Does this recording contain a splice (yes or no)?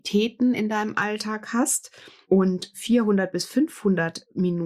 no